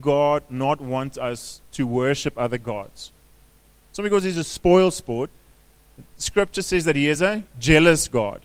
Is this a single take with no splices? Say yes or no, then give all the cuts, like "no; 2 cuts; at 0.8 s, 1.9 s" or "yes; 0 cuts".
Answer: yes; 0 cuts